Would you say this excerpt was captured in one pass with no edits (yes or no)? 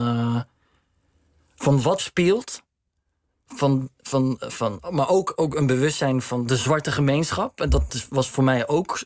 no